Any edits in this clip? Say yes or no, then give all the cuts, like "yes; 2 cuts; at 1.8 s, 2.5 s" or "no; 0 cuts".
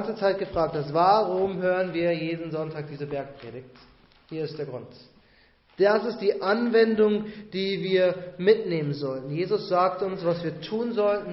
no; 0 cuts